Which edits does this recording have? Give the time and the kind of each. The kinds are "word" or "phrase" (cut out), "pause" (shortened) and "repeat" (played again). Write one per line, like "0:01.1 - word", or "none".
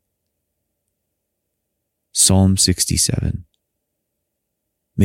none